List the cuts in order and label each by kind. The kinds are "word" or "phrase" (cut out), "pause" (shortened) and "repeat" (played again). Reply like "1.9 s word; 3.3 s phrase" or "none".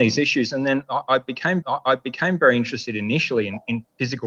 1.6 s repeat